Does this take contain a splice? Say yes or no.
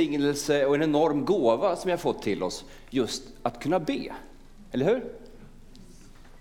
no